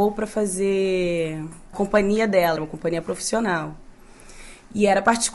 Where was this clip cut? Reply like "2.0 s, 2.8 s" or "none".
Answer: 1.7 s, 2.6 s